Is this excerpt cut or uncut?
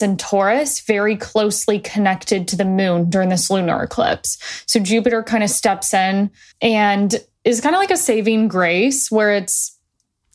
cut